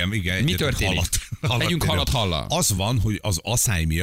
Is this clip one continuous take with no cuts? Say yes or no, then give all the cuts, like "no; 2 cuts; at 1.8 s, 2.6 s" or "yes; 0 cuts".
yes; 0 cuts